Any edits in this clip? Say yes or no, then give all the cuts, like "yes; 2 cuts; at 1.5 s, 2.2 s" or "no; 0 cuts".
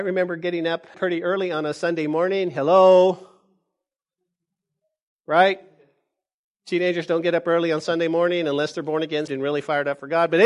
yes; 2 cuts; at 0.9 s, 9.3 s